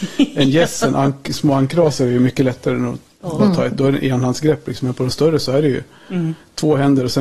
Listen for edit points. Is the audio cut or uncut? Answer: uncut